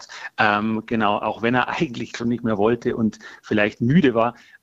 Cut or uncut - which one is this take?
uncut